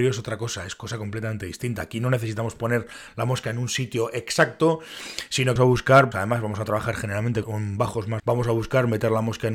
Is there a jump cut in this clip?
yes; 4 cuts; at 5.6 s, 6.1 s, 7.4 s, 8.2 s

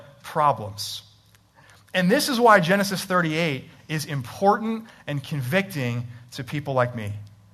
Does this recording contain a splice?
no; 0 cuts

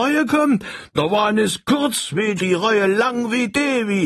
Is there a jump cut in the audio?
yes; 1 cut; at 2.4 s

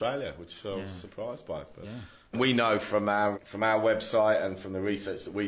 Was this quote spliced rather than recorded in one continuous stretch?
yes; 3 cuts; at 1.8 s, 2.3 s, 3.3 s

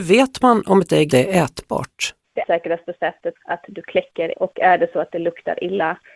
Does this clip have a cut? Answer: yes; 4 cuts; at 1.1 s, 2.4 s, 3.4 s, 4.3 s

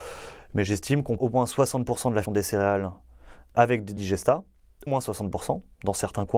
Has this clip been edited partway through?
yes; 4 cuts; at 1.2 s, 2.2 s, 4.0 s, 4.9 s

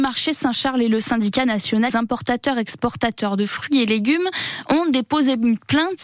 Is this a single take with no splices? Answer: no; 1 cut; at 1.9 s

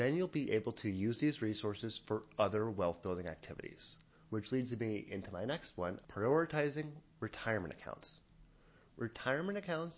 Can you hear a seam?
yes; 1 cut; at 6.0 s

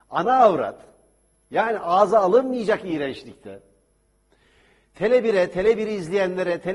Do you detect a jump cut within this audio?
no; 0 cuts

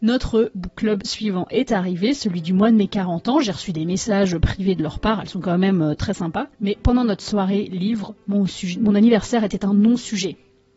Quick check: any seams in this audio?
yes; 1 cut; at 6.5 s

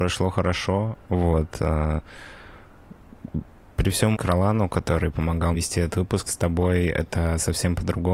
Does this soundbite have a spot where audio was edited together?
yes; 3 cuts; at 4.1 s, 5.5 s, 6.3 s

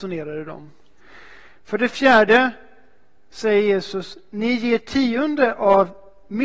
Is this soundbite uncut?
yes; 0 cuts

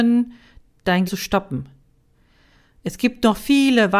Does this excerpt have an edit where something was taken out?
yes; 1 cut; at 1.0 s

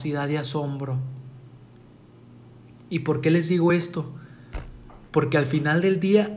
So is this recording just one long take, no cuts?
yes; 0 cuts

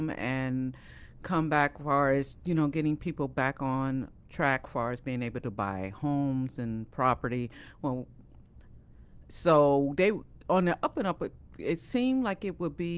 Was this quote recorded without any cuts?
yes; 0 cuts

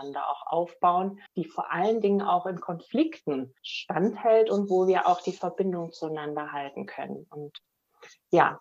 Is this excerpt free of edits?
no; 2 cuts; at 1.3 s, 3.6 s

